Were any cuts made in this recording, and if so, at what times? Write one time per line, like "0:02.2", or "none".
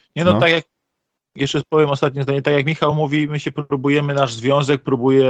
none

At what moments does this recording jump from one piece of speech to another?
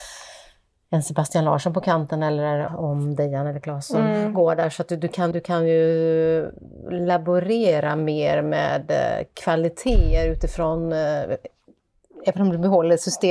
0:02.7
0:05.3

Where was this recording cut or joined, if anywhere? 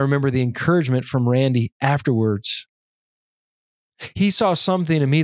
none

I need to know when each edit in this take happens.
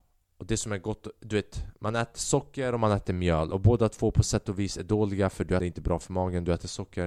0:05.6

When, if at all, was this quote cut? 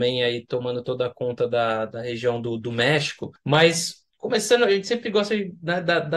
none

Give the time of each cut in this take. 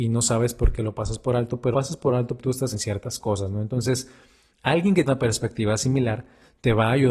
0:01.7
0:02.4
0:02.7
0:05.1

